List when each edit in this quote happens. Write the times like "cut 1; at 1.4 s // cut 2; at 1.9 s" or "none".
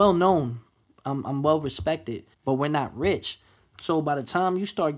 cut 1; at 2.3 s